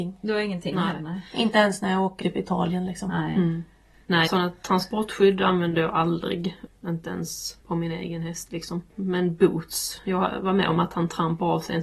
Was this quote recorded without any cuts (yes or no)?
no